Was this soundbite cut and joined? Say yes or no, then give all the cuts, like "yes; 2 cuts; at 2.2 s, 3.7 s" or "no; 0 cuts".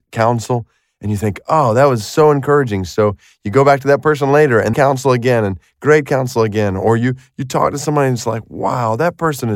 yes; 1 cut; at 4.7 s